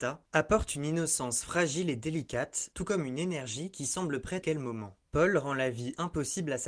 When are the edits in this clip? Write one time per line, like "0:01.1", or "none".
0:04.4